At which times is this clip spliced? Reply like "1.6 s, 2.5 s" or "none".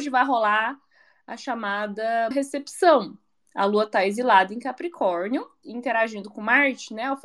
2.3 s, 5.6 s